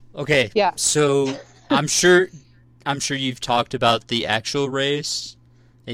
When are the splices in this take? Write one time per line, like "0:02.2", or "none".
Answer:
none